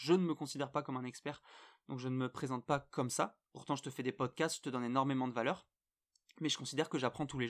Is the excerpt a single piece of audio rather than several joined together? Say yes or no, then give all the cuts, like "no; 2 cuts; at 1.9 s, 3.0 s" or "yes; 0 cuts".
yes; 0 cuts